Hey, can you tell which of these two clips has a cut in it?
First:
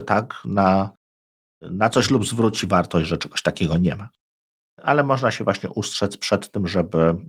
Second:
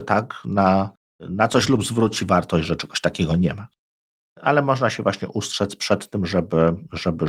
second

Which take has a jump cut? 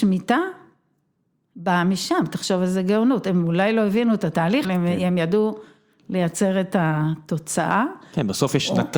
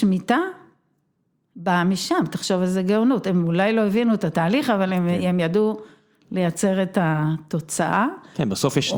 first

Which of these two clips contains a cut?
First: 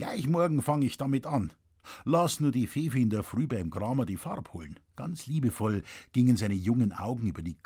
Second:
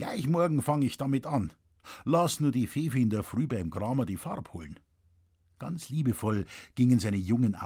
first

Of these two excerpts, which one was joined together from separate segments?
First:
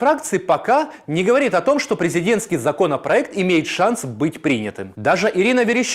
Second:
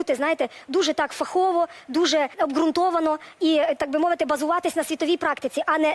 second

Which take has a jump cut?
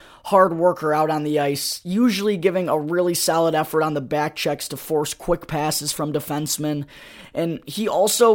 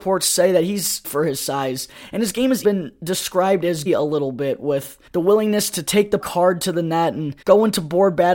second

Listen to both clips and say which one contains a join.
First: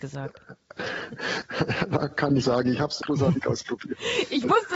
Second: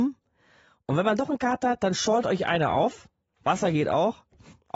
first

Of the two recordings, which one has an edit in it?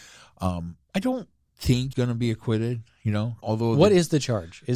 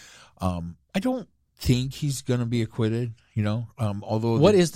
first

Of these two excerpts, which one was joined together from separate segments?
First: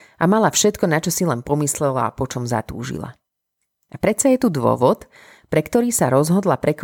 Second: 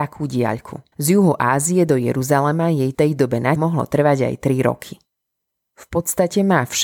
second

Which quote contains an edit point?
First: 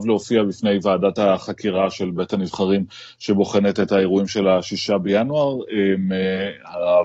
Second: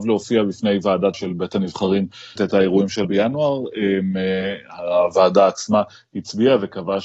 second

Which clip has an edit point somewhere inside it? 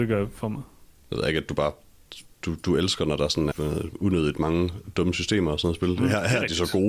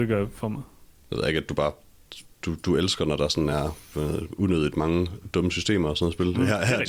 first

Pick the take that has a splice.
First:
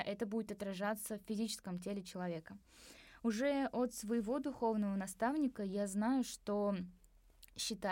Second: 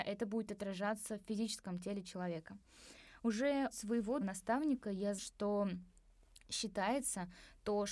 second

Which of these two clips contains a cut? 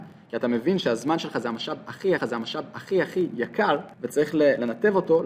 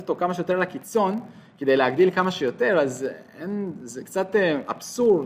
first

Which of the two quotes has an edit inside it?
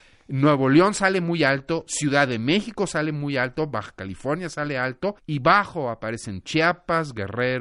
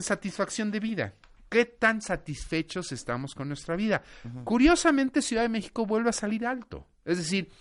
first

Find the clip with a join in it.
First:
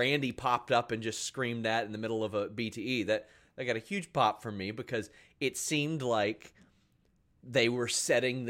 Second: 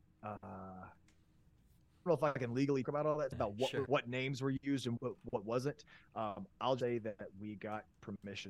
second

